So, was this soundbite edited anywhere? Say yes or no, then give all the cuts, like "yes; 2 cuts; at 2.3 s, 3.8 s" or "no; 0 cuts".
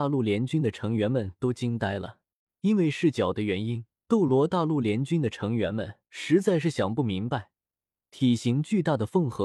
yes; 3 cuts; at 2.4 s, 3.9 s, 6.1 s